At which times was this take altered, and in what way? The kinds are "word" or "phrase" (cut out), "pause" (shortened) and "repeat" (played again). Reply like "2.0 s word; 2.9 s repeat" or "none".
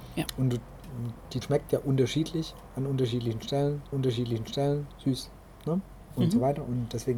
1.4 s word; 3.9 s repeat